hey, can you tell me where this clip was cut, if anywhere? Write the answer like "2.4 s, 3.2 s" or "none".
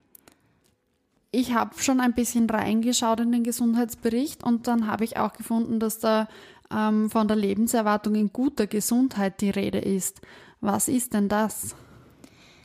none